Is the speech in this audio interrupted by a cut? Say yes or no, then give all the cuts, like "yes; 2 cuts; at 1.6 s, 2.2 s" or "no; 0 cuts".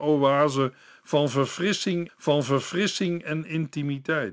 yes; 1 cut; at 2.1 s